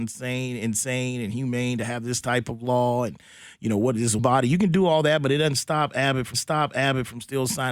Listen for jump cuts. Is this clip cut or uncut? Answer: cut